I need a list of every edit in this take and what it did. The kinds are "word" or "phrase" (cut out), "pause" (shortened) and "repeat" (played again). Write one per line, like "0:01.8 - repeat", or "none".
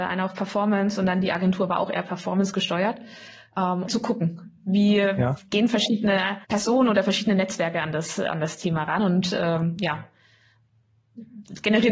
0:03.9 - word
0:06.4 - pause